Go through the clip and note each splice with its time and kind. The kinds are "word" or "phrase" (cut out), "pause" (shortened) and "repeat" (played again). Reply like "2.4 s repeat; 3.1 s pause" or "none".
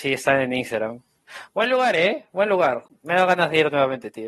2.9 s pause